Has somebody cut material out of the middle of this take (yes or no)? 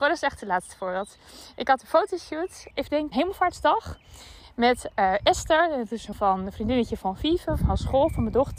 yes